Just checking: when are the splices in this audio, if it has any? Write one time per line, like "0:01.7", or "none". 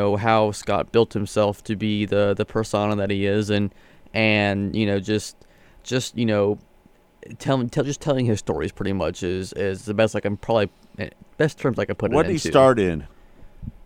none